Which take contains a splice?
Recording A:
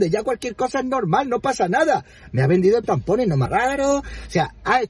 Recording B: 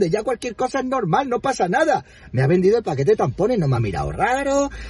A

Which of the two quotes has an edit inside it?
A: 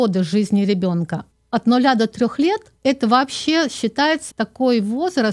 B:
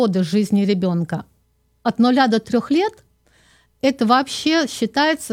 A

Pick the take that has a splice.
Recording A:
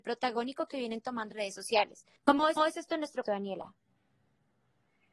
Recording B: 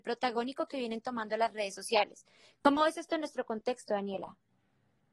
A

